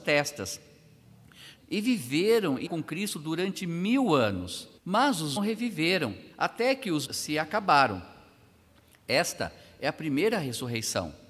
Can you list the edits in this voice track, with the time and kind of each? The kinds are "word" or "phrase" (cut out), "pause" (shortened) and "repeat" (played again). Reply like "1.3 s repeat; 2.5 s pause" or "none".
1.6 s phrase; 2.7 s word; 4.8 s pause; 5.4 s phrase; 6.3 s pause; 7.0 s phrase